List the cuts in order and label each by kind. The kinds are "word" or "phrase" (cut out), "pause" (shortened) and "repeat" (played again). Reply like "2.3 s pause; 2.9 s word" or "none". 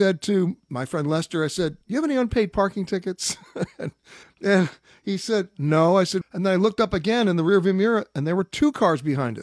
1.8 s pause; 4.2 s word; 6.2 s word